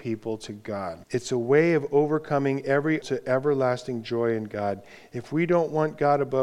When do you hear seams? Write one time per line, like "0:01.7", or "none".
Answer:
0:01.0
0:03.0

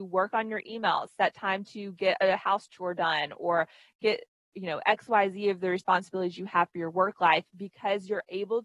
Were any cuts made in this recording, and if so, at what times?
none

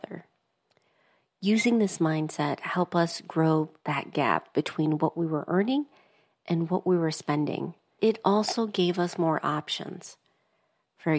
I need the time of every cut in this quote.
0:03.8

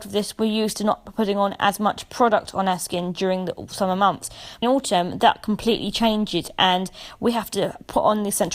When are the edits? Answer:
0:04.6

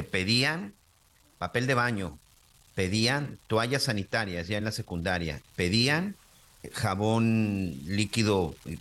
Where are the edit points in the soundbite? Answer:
none

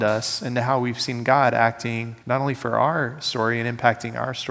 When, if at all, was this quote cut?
0:02.2

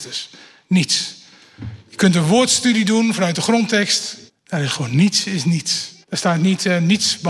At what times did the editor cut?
0:04.3
0:06.0

